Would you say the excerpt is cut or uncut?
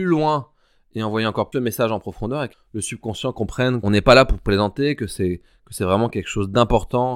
cut